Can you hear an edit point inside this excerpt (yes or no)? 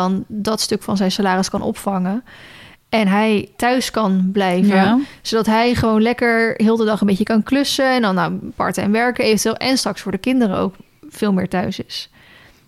no